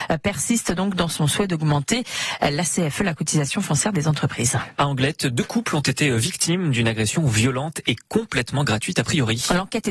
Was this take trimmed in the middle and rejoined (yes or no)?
no